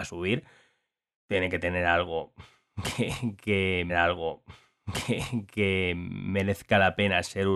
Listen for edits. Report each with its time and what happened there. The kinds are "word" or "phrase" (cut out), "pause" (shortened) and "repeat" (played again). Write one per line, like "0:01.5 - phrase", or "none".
0:03.9 - repeat